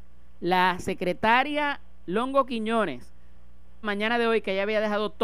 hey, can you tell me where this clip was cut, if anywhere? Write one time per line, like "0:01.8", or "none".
0:03.8